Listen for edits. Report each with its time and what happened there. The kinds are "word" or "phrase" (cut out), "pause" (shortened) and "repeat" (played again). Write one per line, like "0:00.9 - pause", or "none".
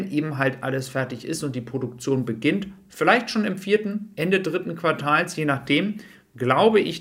none